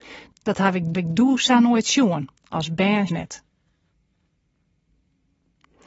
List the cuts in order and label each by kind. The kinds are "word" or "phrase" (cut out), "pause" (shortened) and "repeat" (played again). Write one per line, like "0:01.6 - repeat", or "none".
0:00.9 - repeat
0:02.4 - pause
0:03.1 - phrase